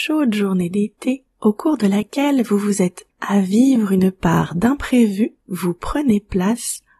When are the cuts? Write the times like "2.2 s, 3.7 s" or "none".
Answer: 1.3 s, 3.1 s, 5.4 s

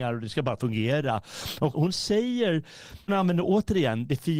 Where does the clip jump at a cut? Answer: 1.7 s, 3.1 s

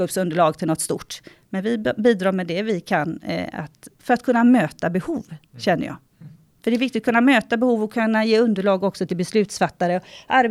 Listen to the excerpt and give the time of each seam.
none

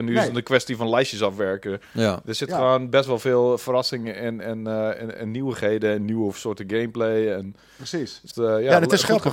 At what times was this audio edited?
8.3 s

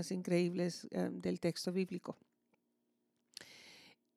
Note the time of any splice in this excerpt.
none

